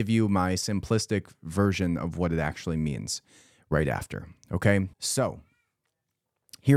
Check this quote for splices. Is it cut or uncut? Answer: cut